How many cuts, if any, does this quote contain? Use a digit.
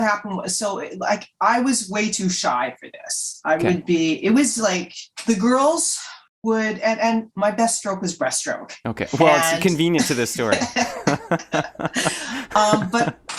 0